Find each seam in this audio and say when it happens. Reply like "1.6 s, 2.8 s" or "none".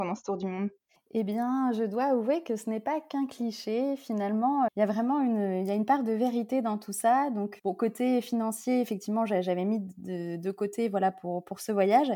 4.7 s, 7.6 s